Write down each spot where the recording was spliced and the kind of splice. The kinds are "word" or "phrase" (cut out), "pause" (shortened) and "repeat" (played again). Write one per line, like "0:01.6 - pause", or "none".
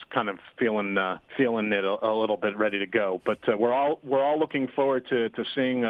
0:01.3 - pause